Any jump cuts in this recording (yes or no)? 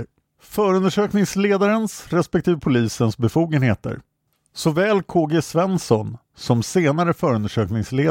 no